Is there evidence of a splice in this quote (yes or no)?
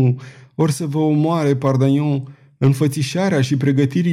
no